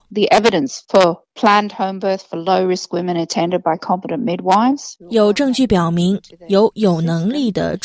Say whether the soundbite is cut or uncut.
uncut